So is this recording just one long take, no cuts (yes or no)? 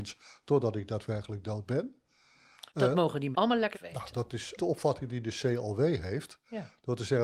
no